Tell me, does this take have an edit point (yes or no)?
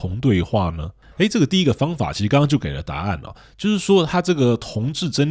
no